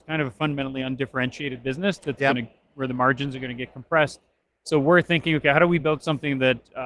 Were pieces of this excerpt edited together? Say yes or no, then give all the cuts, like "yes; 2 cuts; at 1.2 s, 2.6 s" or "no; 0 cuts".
no; 0 cuts